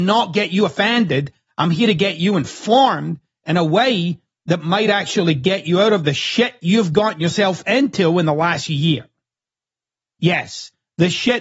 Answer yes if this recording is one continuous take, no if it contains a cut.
yes